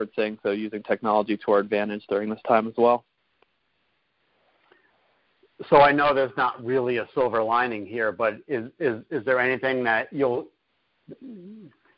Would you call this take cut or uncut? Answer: uncut